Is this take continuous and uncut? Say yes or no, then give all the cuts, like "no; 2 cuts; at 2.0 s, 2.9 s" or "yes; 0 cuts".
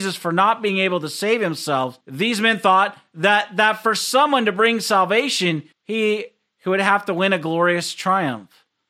no; 2 cuts; at 2.0 s, 5.7 s